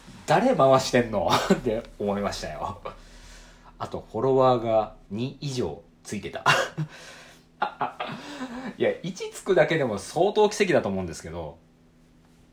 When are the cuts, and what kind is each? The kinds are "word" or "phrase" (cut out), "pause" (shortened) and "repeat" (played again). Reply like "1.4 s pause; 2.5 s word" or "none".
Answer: 5.0 s pause; 5.9 s pause; 7.6 s phrase